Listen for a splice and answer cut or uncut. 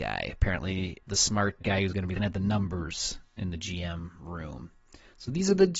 cut